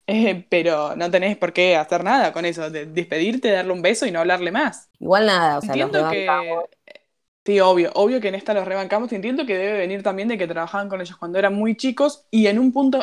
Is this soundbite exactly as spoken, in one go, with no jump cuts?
yes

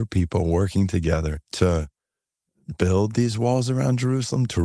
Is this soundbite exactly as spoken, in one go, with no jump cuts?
no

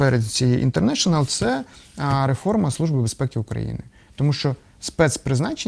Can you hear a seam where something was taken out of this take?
no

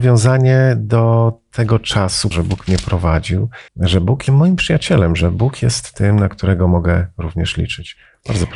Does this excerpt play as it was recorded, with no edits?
no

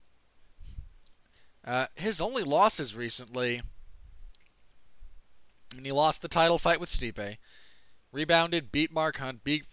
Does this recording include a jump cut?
no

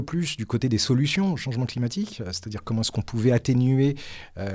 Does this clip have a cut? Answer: no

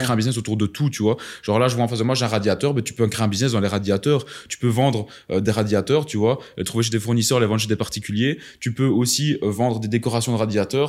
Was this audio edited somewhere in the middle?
no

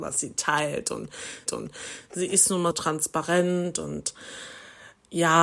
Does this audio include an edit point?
yes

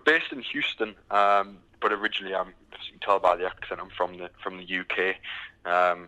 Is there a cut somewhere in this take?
no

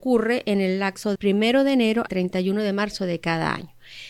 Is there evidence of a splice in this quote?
yes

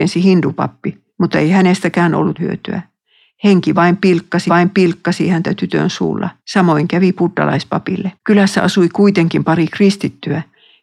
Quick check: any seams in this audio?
yes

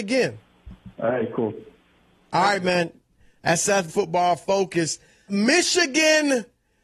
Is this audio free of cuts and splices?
no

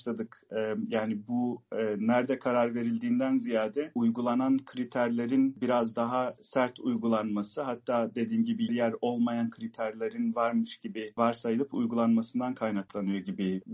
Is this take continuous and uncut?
no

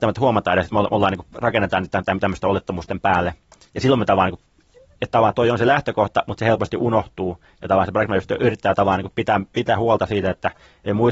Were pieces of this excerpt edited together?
no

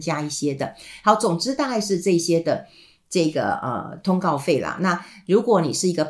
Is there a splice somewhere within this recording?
no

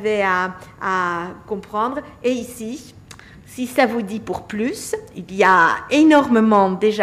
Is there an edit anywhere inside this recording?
no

